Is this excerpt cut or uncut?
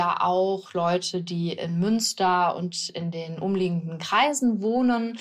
uncut